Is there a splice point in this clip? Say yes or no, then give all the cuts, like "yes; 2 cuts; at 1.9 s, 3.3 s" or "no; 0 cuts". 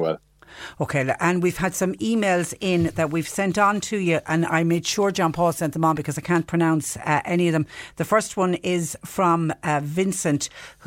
no; 0 cuts